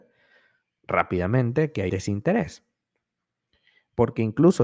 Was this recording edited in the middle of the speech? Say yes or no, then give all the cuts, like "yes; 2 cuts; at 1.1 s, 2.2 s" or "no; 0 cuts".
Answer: yes; 1 cut; at 1.9 s